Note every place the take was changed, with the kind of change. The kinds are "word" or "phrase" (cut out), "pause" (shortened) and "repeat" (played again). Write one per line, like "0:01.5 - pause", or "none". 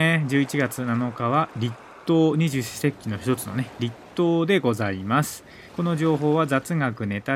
0:05.7 - pause